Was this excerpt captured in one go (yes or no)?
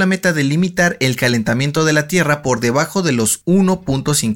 yes